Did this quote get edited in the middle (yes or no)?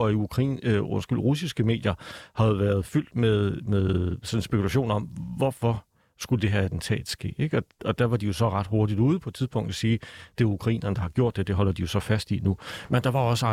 no